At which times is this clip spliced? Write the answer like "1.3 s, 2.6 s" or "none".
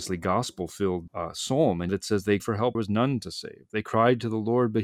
1.1 s, 1.9 s, 2.4 s, 2.7 s